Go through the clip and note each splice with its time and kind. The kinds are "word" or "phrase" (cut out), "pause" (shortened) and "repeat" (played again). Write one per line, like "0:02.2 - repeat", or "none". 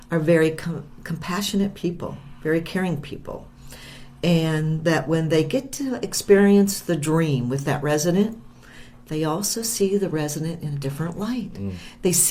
none

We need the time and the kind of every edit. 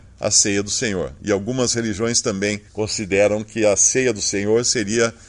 0:02.7 - pause

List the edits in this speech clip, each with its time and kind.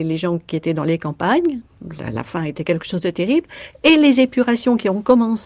none

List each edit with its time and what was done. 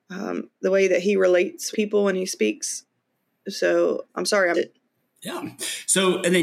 0:01.7 - word
0:04.1 - word
0:04.5 - word

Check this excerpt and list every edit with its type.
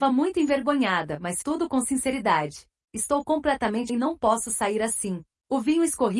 0:01.4 - word
0:03.9 - word

